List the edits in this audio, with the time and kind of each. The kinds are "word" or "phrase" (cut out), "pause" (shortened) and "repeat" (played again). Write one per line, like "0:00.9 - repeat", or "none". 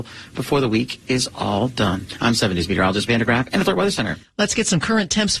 0:03.1 - word
0:03.7 - word